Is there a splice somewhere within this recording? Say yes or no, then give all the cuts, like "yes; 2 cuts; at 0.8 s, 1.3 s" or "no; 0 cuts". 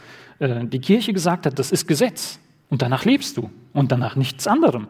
no; 0 cuts